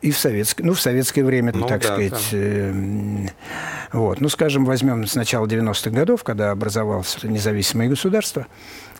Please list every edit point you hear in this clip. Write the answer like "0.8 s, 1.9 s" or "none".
1.5 s, 7.2 s